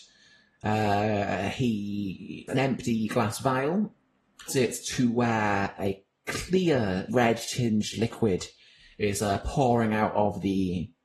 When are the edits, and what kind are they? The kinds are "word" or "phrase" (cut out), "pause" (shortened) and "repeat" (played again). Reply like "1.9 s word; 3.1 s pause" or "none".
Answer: 2.5 s word; 4.5 s word; 5.8 s word; 7.1 s word